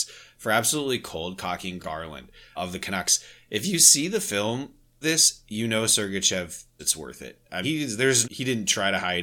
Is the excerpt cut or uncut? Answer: cut